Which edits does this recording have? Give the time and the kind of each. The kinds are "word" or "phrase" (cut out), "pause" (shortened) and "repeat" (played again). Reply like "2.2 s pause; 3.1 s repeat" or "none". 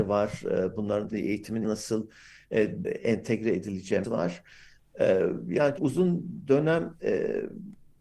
1.1 s word; 1.6 s word; 2.8 s word; 4.0 s word; 5.8 s word; 7.0 s word